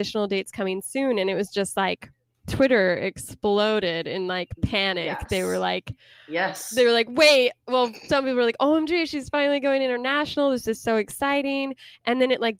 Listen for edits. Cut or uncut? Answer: uncut